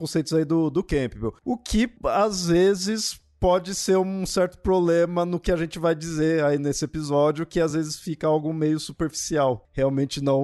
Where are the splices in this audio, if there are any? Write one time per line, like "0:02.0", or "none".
none

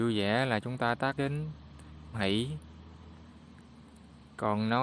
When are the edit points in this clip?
0:01.2
0:02.1

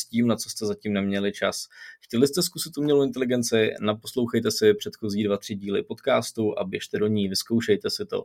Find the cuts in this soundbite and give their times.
none

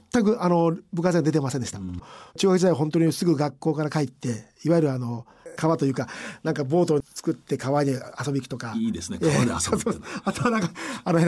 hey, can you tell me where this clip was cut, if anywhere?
0:02.3

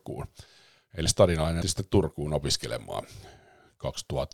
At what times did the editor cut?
0:01.1
0:01.6

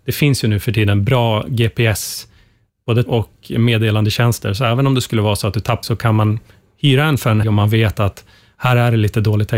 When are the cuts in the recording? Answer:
0:03.1
0:05.8
0:07.4

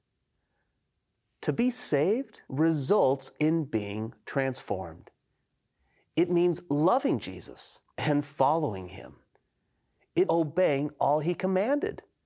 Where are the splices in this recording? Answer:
0:02.4
0:07.9
0:10.2

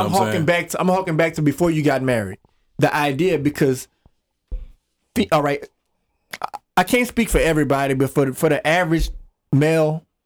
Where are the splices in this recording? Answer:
none

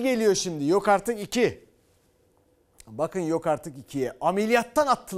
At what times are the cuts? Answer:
none

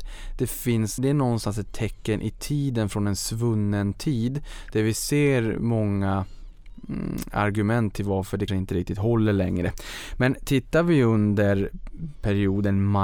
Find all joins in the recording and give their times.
0:01.0
0:08.5

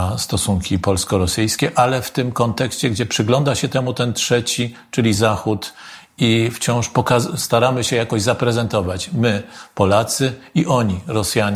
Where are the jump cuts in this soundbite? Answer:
none

